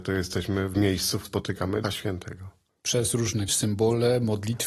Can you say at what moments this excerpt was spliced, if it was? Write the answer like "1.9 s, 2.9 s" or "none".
1.2 s, 1.8 s, 3.5 s